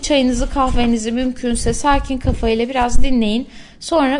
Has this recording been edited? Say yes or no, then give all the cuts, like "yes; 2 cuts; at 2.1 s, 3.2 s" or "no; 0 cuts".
no; 0 cuts